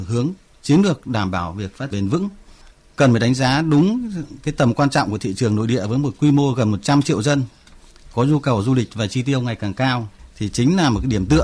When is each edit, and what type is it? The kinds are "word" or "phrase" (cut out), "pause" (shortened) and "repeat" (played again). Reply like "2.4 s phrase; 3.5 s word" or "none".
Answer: 1.9 s word